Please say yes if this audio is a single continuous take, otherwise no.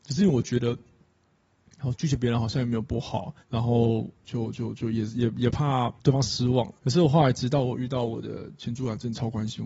no